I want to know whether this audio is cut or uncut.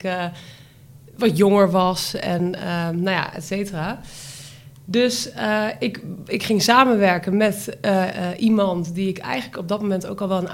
uncut